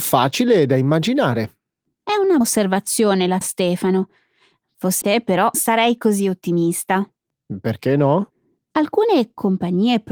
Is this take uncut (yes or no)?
no